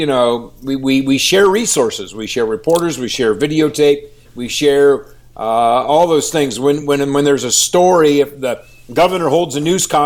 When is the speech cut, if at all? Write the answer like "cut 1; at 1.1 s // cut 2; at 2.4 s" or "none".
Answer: none